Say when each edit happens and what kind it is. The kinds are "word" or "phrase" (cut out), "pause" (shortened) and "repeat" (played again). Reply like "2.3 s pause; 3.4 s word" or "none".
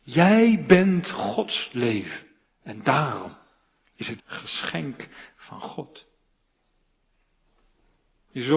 2.4 s pause; 4.2 s word